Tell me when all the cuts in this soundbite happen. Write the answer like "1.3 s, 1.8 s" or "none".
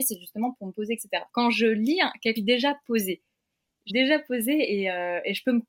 1.3 s, 2.4 s, 3.9 s